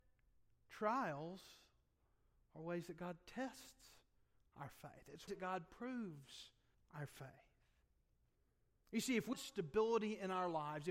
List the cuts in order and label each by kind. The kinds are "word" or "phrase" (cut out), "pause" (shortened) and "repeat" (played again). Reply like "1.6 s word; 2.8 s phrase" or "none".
5.3 s word; 6.7 s pause; 9.3 s word

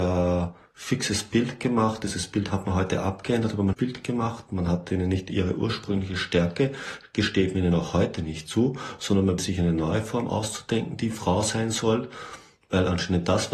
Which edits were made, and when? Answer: 3.7 s phrase; 9.4 s word

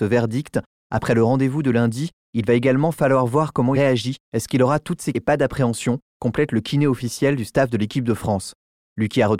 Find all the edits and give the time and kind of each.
3.7 s word; 5.1 s word

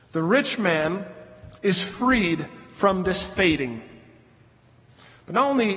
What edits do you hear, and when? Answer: 1.6 s pause

